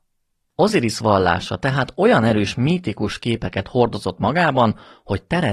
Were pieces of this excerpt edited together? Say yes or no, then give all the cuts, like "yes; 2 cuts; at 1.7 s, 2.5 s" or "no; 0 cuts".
no; 0 cuts